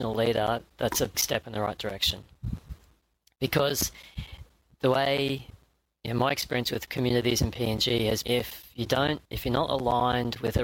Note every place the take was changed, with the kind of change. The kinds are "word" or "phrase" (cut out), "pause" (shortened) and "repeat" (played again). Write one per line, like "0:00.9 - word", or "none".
0:01.1 - word
0:08.2 - word
0:09.3 - pause